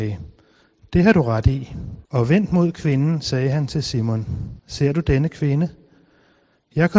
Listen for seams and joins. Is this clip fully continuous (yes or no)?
no